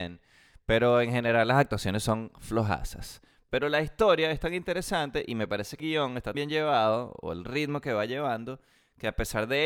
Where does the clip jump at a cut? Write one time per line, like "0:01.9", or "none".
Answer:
0:05.8
0:06.3